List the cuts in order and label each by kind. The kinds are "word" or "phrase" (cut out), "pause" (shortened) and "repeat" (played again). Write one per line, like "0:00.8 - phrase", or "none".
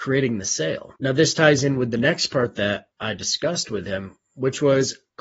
0:01.0 - pause